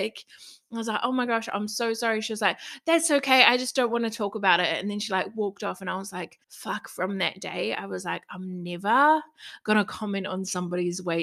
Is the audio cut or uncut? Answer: cut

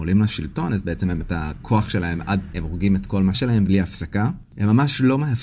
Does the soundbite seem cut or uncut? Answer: cut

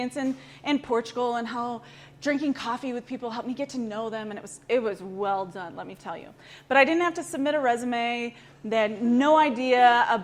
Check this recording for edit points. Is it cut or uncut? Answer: uncut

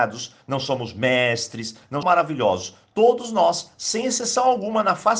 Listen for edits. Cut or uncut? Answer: cut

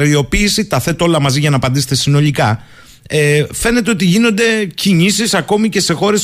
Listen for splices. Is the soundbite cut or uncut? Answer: uncut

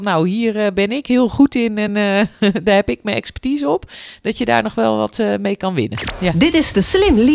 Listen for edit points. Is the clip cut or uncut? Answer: uncut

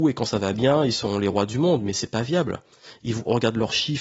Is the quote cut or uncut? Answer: uncut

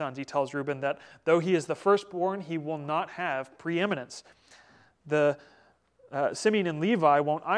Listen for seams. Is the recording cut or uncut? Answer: uncut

